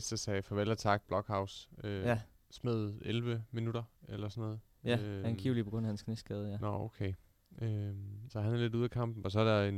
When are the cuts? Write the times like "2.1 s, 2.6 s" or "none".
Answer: 1.0 s, 8.3 s